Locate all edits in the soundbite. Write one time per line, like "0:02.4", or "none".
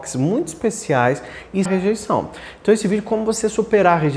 0:01.7